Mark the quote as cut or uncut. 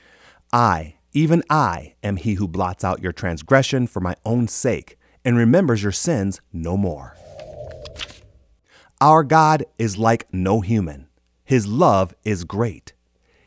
uncut